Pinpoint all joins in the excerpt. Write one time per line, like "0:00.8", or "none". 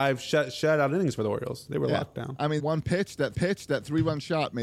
0:02.6
0:03.3

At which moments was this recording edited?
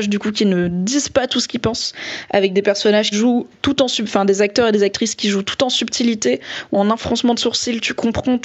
0:03.1
0:06.7

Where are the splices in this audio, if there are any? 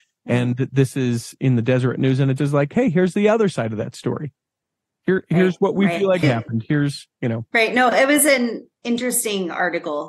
0:02.4
0:06.2
0:07.5

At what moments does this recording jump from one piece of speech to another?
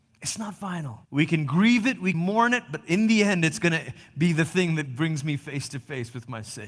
0:01.0
0:02.1

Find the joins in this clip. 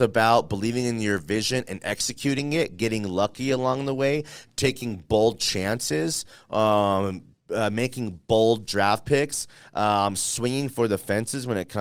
none

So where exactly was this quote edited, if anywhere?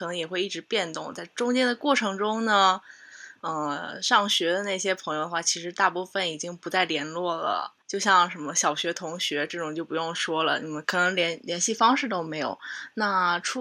0:07.8

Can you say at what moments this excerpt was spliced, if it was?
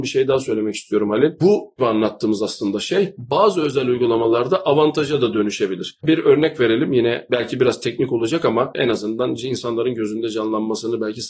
0:01.8

